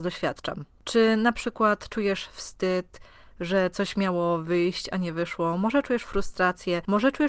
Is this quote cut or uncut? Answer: uncut